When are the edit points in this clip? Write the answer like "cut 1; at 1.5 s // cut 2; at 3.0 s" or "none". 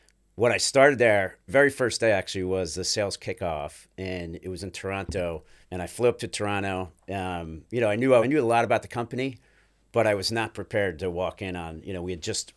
cut 1; at 1.5 s // cut 2; at 5.6 s // cut 3; at 8.2 s